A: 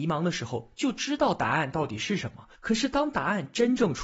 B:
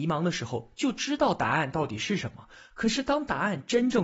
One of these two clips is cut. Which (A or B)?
A